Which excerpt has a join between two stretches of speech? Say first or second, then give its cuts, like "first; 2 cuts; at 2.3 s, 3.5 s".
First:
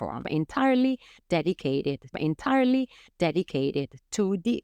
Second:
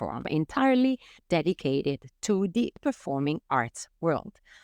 first; 1 cut; at 2.1 s